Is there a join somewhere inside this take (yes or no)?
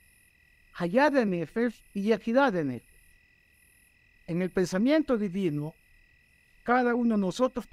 no